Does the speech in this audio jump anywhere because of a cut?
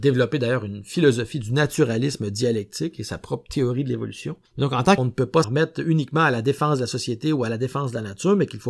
yes; 3 cuts; at 4.5 s, 5.0 s, 5.4 s

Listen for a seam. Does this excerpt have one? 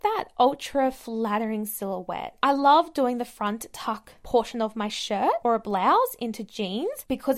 no; 0 cuts

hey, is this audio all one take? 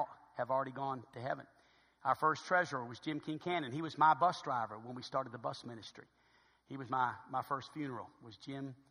yes; 0 cuts

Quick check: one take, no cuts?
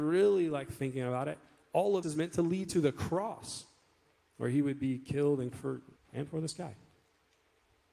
no; 3 cuts; at 2.0 s, 5.5 s, 6.0 s

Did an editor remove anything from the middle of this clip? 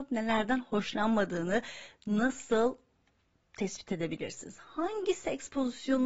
no; 0 cuts

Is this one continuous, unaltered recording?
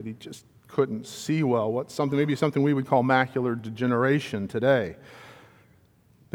yes; 0 cuts

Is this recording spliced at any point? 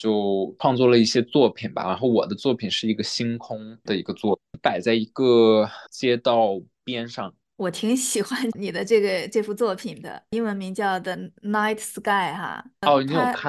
yes; 2 cuts; at 3.9 s, 5.9 s

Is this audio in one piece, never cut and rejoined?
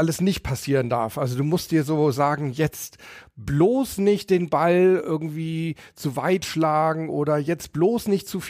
yes; 0 cuts

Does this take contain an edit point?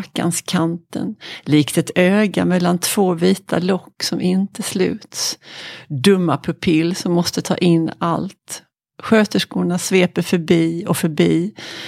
no; 0 cuts

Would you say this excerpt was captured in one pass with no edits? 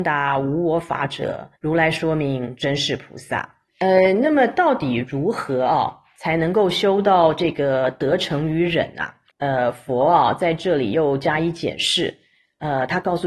no; 3 cuts; at 1.6 s, 3.7 s, 9.3 s

